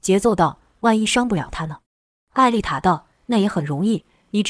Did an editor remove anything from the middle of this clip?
yes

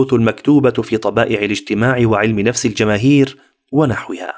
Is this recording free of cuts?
yes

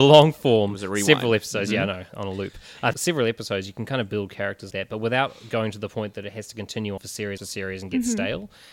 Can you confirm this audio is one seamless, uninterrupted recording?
no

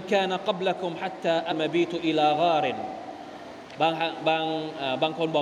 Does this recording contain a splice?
yes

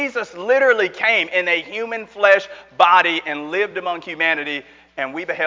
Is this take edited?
no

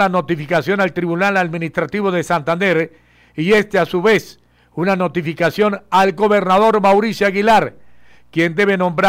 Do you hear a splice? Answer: no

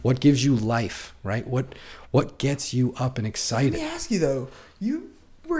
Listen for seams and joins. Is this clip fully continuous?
yes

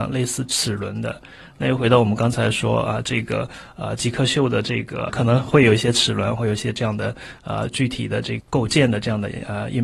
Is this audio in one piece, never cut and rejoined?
no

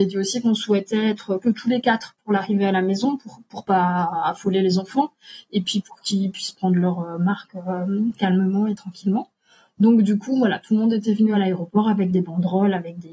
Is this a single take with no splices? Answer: yes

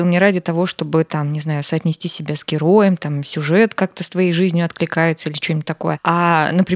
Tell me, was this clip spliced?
no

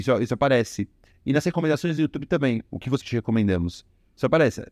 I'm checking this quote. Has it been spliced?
yes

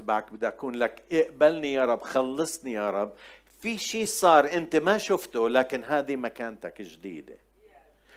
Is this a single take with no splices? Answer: yes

